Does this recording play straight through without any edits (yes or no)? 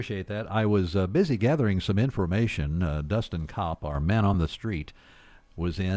yes